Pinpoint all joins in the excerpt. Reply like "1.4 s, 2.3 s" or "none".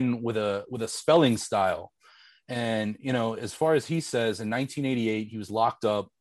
none